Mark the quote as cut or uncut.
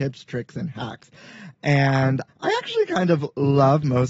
cut